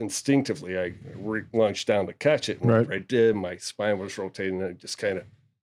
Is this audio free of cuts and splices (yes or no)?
yes